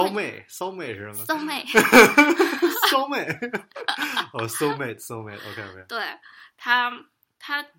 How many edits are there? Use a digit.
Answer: 0